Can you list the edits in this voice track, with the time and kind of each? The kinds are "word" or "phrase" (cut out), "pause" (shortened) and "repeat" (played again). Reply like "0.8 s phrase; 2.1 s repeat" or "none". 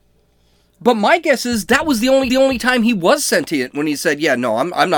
2.3 s repeat